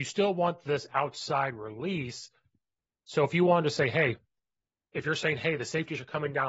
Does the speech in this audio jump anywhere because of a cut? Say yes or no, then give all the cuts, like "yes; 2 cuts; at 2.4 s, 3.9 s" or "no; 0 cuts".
no; 0 cuts